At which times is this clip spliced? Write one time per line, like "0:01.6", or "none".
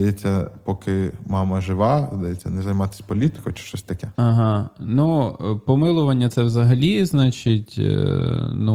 0:04.1